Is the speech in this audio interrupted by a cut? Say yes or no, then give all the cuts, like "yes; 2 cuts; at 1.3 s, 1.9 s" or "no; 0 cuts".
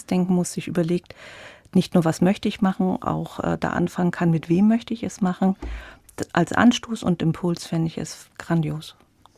no; 0 cuts